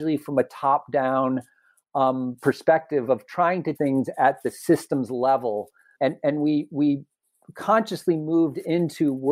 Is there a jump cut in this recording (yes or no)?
yes